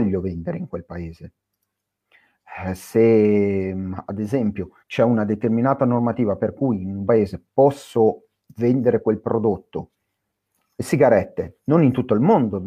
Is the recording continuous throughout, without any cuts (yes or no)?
no